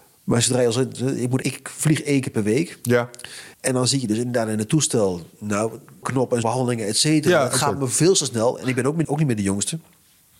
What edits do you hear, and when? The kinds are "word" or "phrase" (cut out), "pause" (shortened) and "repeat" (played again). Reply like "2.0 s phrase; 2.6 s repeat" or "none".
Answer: 1.4 s word; 3.5 s pause; 6.0 s word; 6.4 s word; 9.0 s word